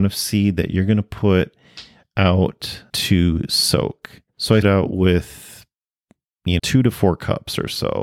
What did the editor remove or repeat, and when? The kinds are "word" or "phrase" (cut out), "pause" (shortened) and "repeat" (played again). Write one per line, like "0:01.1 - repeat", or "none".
0:02.9 - word
0:04.3 - pause
0:04.6 - word
0:06.6 - word